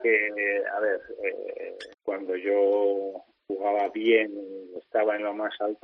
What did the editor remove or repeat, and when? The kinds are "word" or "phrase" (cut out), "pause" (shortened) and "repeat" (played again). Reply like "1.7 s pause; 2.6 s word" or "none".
1.9 s pause